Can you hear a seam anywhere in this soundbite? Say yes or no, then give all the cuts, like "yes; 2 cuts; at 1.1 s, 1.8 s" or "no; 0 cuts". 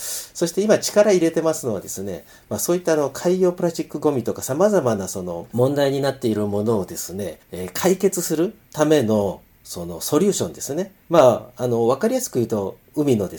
yes; 3 cuts; at 7.4 s, 8.6 s, 11.0 s